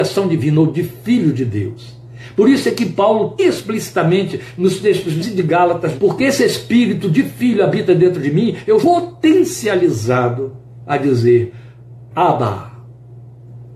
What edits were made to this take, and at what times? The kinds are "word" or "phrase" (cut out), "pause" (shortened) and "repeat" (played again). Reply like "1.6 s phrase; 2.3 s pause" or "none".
3.4 s word; 5.2 s word; 6.0 s word; 8.8 s word; 12.1 s word